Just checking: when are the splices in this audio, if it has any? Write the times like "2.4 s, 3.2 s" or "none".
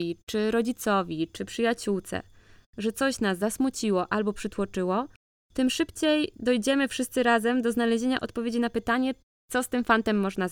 3.4 s